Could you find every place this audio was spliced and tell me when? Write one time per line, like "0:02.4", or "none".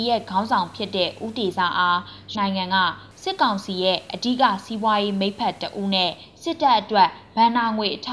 0:02.3